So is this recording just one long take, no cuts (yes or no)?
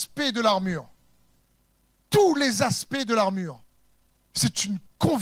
yes